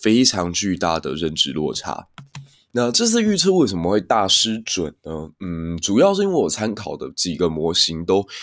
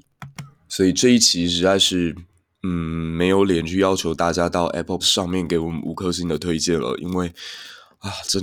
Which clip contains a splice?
second; 1 cut; at 5.0 s

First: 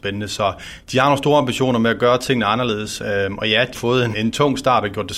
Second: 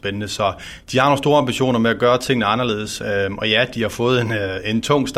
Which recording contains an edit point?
first; 2 cuts; at 3.7 s, 4.1 s

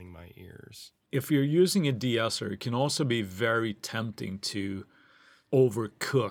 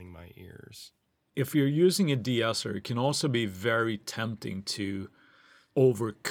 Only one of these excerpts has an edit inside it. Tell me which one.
first; 1 cut; at 1.0 s

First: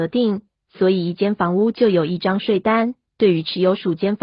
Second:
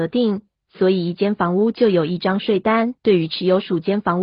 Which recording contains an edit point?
second; 1 cut; at 3.0 s

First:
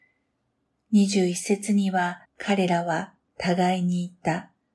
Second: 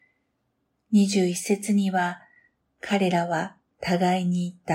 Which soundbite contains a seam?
first; 1 cut; at 2.3 s

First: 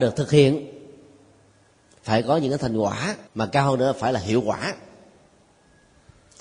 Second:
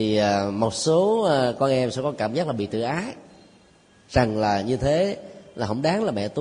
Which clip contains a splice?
first; 1 cut; at 3.3 s

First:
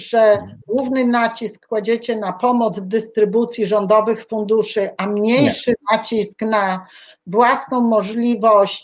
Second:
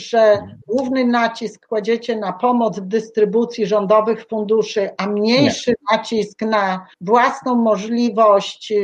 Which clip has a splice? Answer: second; 1 cut; at 6.9 s

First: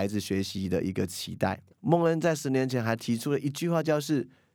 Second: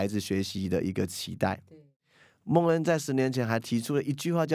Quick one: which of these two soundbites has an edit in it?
first; 1 cut; at 1.7 s

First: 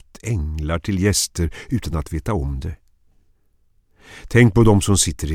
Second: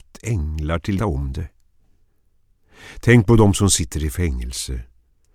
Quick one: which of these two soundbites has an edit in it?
second; 1 cut; at 1.0 s

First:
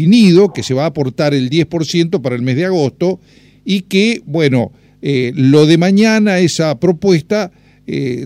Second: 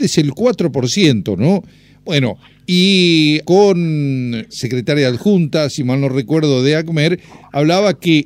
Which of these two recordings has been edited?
second; 2 cuts; at 3.4 s, 4.5 s

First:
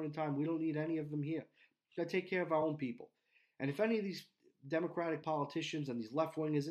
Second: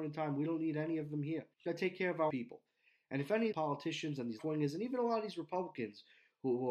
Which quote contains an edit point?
second; 4 cuts; at 1.5 s, 2.3 s, 3.5 s, 4.4 s

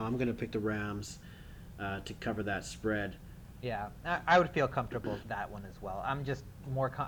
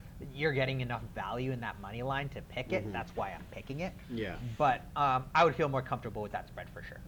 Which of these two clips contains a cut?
first; 1 cut; at 5.2 s

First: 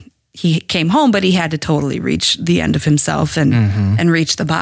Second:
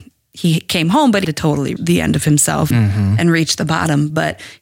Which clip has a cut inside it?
second; 3 cuts; at 1.2 s, 1.8 s, 2.7 s

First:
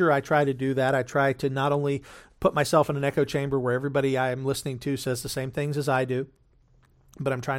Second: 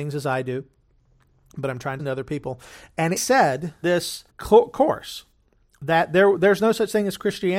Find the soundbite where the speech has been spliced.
second; 4 cuts; at 2.0 s, 3.2 s, 3.8 s, 4.3 s

